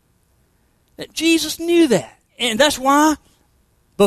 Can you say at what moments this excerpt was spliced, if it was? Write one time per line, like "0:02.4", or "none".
0:02.3